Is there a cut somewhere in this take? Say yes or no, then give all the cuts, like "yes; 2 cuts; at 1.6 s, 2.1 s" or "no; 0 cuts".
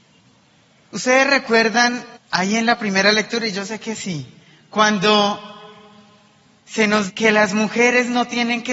yes; 3 cuts; at 2.2 s, 4.4 s, 7.1 s